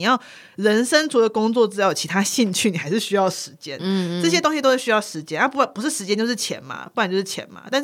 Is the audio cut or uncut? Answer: uncut